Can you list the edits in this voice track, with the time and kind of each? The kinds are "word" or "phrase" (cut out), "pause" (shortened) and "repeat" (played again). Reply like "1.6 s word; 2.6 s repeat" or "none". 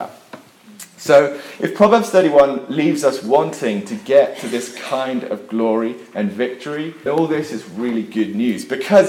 7.1 s word